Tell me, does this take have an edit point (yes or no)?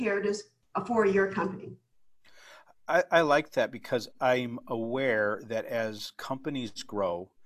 no